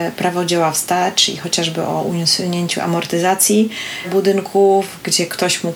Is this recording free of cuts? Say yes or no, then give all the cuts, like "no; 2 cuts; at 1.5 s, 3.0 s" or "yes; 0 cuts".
yes; 0 cuts